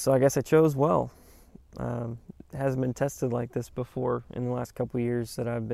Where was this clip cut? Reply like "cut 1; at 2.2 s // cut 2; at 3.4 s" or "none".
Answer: none